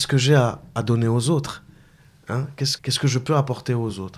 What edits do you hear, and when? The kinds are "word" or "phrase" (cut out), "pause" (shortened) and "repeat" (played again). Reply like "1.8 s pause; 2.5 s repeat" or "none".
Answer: 2.8 s word